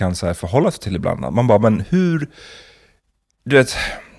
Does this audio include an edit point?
no; 0 cuts

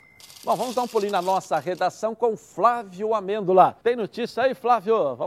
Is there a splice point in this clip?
yes; 1 cut; at 3.8 s

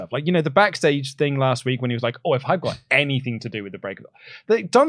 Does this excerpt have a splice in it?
no; 0 cuts

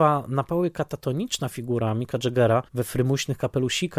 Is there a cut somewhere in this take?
yes; 1 cut; at 2.7 s

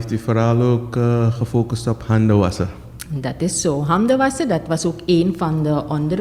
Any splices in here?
no; 0 cuts

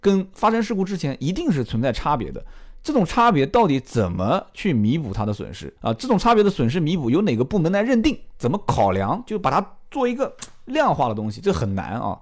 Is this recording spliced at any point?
yes; 1 cut; at 5.8 s

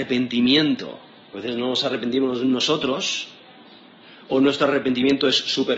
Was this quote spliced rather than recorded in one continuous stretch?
no; 0 cuts

